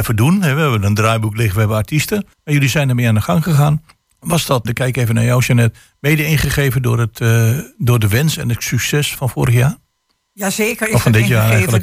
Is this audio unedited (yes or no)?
no